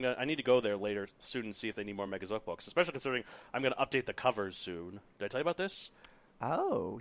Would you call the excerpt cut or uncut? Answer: uncut